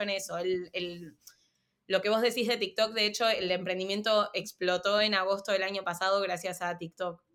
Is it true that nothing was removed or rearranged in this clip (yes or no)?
yes